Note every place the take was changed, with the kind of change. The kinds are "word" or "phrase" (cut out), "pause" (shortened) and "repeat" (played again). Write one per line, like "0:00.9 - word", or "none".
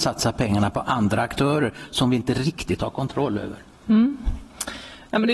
0:03.7 - pause